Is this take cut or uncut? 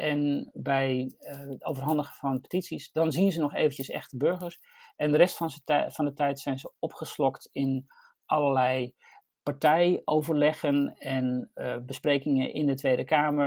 uncut